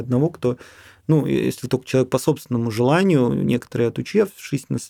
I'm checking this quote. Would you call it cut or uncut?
uncut